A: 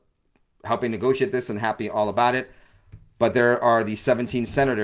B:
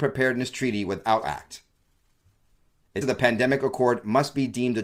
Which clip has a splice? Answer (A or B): B